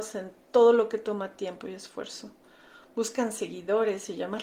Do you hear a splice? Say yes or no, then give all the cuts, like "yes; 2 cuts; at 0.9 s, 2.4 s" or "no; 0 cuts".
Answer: no; 0 cuts